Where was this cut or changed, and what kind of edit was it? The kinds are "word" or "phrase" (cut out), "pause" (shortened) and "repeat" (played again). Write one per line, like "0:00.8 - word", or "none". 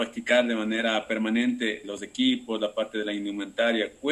0:01.8 - word